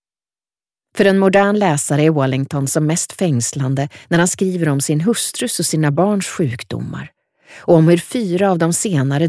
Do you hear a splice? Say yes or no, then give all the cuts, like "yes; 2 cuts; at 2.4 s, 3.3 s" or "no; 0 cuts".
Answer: no; 0 cuts